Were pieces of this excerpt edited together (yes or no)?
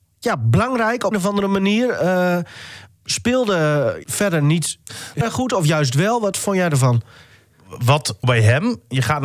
yes